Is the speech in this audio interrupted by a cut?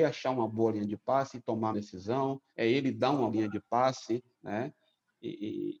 yes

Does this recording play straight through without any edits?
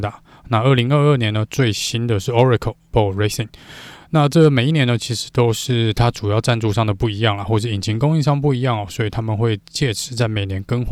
no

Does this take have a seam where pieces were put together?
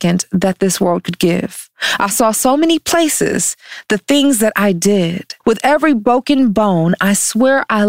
yes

